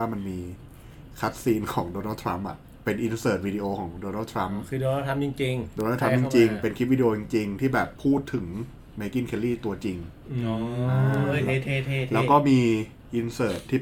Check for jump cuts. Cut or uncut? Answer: uncut